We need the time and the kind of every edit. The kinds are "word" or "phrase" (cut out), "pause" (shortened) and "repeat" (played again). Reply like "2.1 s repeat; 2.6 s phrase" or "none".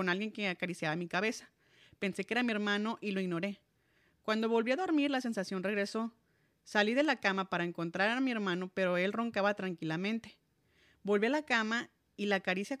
none